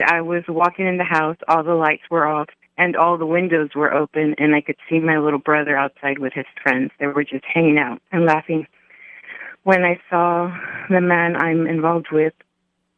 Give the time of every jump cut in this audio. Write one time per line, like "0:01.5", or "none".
0:02.6
0:08.0